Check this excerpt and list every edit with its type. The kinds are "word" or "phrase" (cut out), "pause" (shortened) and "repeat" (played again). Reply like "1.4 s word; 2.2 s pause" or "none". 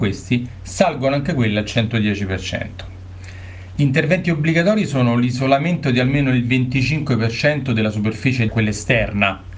8.5 s phrase